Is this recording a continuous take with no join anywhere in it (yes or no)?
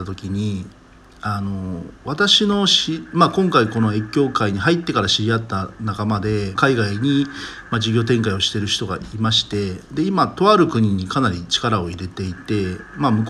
no